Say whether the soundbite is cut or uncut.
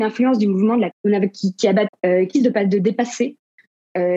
cut